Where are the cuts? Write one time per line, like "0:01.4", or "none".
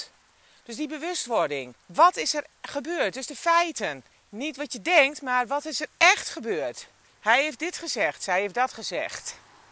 0:01.8
0:04.1
0:07.0

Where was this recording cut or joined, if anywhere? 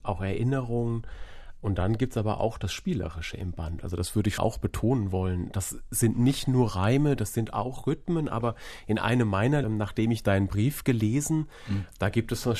0:04.4
0:09.6

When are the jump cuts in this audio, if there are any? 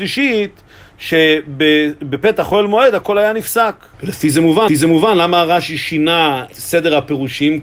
0:03.9
0:04.7
0:06.5

